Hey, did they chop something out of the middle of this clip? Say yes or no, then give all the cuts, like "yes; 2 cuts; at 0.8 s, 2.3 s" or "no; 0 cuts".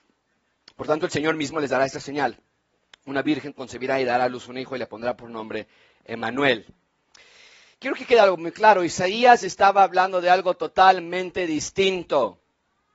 no; 0 cuts